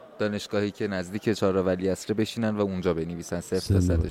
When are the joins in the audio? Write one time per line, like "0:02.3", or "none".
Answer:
none